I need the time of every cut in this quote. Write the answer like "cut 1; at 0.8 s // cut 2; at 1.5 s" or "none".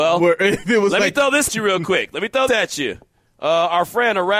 cut 1; at 1.5 s // cut 2; at 2.5 s